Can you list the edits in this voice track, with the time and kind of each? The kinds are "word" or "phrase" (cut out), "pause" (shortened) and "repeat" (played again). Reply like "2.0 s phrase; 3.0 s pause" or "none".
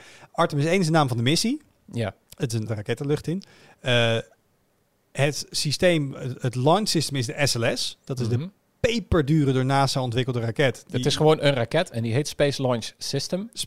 2.7 s phrase